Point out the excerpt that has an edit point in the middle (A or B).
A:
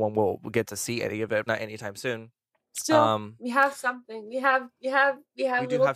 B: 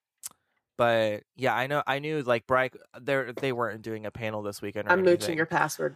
A